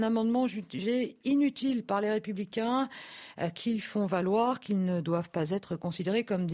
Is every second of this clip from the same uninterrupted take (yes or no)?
yes